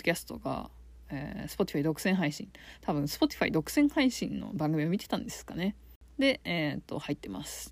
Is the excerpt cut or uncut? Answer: uncut